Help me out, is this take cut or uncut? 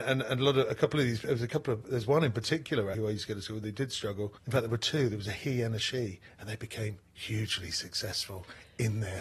cut